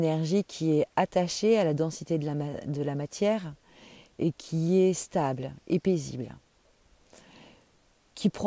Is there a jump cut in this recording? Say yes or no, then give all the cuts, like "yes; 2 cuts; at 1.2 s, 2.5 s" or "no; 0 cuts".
no; 0 cuts